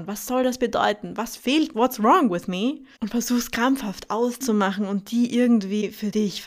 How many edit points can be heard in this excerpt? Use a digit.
2